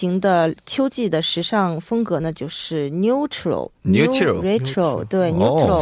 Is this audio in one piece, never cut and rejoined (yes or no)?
no